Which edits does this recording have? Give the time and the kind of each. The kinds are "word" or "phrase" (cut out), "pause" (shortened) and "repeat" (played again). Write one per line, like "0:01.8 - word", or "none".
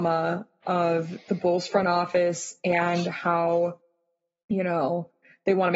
none

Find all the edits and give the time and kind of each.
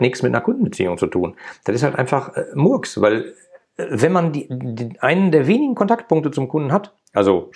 none

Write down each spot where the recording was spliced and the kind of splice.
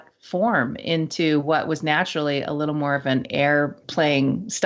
none

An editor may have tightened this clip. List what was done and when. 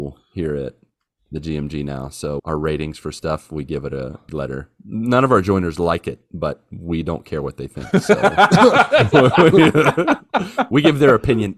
0:02.4 - phrase
0:04.3 - phrase

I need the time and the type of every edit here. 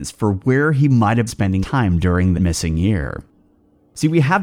0:01.3 - word
0:01.6 - word
0:02.3 - word

